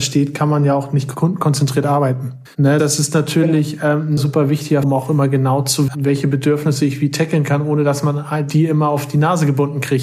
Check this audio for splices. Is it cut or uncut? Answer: cut